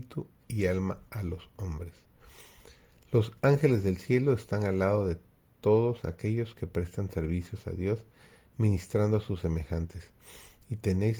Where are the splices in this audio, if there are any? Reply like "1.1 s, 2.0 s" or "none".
none